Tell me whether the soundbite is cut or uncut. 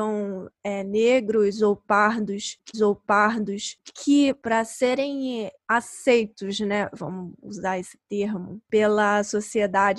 cut